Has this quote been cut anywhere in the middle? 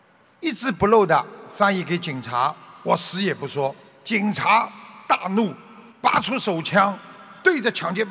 yes; 2 cuts; at 3.9 s, 5.9 s

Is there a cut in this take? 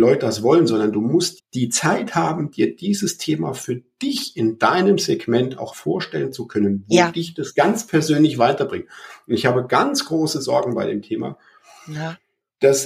yes; 2 cuts; at 1.4 s, 5.7 s

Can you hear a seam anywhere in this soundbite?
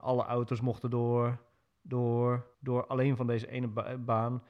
yes; 1 cut; at 2.5 s

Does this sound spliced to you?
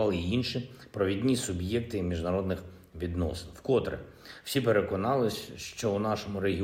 no; 0 cuts

